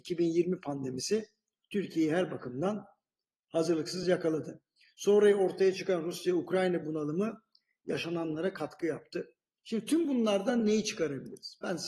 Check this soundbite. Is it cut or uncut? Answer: uncut